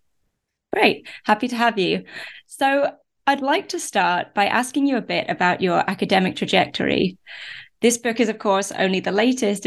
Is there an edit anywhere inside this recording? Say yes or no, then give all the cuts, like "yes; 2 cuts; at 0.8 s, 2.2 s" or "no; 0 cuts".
no; 0 cuts